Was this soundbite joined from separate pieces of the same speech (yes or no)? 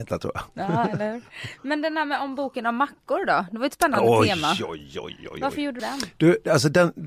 yes